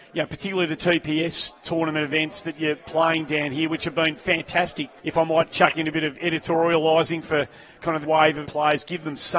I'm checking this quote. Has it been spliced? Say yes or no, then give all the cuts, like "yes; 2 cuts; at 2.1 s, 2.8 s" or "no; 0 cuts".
yes; 3 cuts; at 5.0 s, 8.0 s, 8.4 s